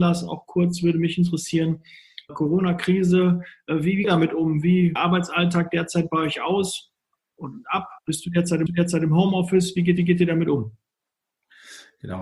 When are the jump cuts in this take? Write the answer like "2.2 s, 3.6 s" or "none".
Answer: 2.3 s, 4.0 s, 5.0 s, 8.0 s, 8.7 s, 10.0 s